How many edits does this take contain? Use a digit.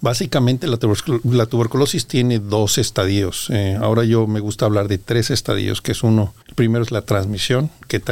1